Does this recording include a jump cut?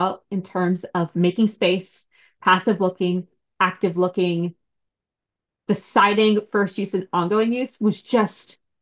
no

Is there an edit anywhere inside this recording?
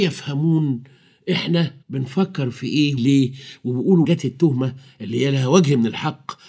yes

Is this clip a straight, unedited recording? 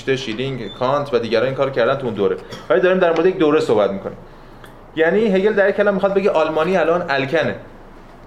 yes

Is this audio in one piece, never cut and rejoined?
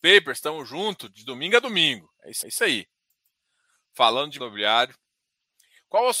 no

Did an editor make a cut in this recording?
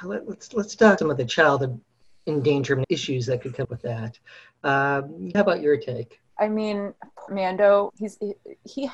yes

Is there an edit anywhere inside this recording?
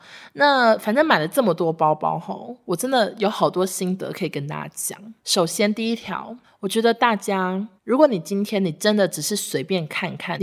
yes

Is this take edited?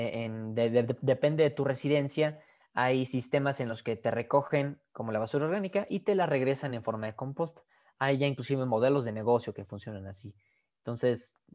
no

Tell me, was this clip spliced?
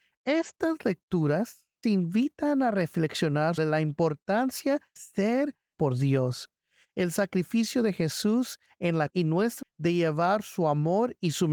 yes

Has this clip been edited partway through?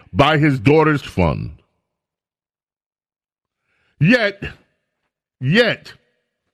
yes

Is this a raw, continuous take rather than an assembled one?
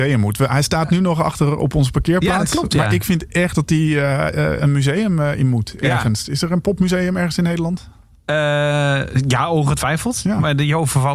yes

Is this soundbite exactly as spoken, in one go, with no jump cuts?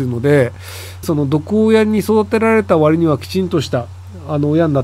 no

